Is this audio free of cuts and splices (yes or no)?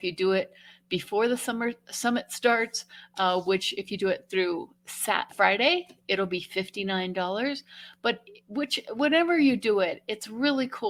no